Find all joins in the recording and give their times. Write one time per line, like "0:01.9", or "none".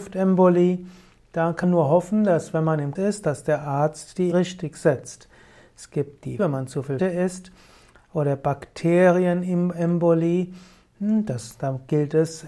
0:01.6
0:03.0
0:04.3
0:06.4
0:07.0